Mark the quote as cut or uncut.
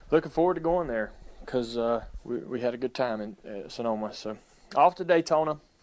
uncut